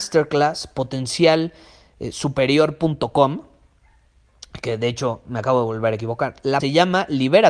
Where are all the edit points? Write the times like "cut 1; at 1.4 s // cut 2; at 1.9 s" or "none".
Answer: cut 1; at 6.6 s